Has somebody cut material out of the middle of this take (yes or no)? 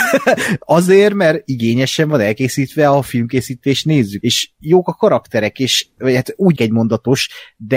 yes